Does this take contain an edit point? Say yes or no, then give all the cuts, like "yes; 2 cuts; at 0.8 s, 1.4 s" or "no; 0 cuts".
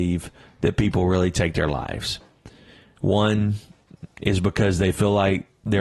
no; 0 cuts